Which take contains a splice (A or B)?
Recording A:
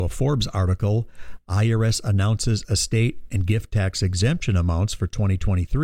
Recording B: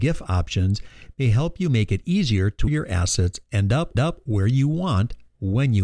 B